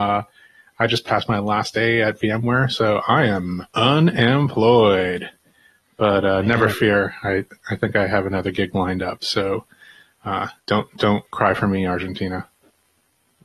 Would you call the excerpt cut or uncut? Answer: cut